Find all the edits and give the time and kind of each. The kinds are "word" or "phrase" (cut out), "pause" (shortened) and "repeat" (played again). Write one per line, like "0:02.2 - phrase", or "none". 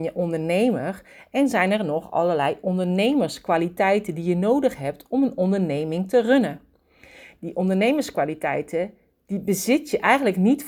none